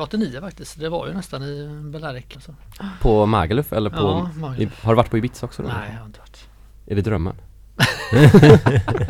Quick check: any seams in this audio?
yes; 1 cut; at 2.3 s

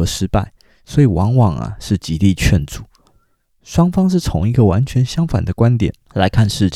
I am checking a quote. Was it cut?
no; 0 cuts

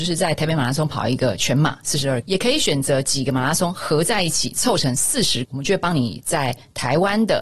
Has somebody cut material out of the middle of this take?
yes; 2 cuts; at 2.2 s, 5.4 s

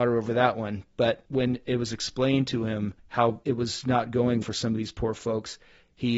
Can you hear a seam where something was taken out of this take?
yes; 2 cuts; at 3.0 s, 4.4 s

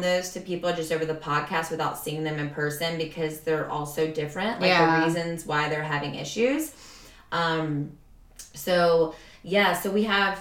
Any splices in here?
no; 0 cuts

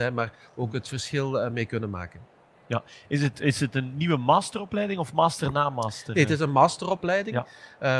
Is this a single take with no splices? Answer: yes; 0 cuts

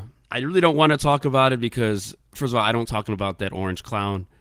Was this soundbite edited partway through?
yes; 1 cut; at 2.9 s

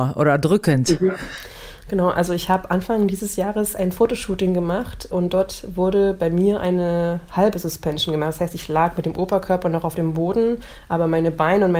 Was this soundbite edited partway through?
no; 0 cuts

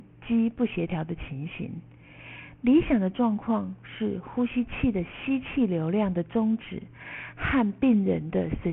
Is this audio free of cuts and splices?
yes; 0 cuts

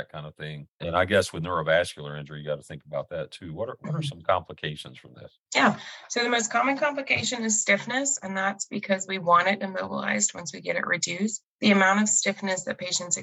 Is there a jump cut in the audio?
yes; 1 cut; at 5.4 s

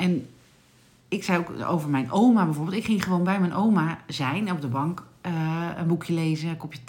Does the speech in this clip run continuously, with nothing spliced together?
yes; 0 cuts

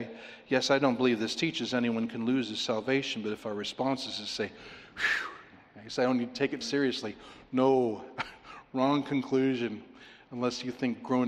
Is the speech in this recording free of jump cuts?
no; 1 cut; at 6.6 s

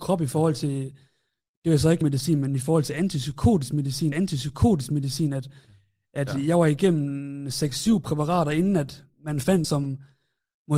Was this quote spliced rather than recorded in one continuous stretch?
yes; 4 cuts; at 2.0 s, 4.1 s, 9.1 s, 9.6 s

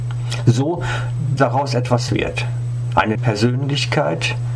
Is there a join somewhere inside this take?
yes; 3 cuts; at 1.4 s, 2.1 s, 3.1 s

